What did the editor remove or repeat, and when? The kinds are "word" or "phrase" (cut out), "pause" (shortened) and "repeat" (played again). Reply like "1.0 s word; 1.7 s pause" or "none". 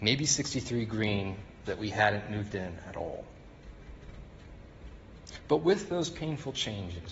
1.7 s word